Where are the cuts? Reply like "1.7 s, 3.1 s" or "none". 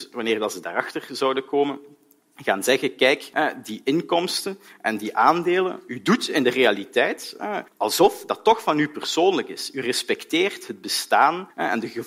none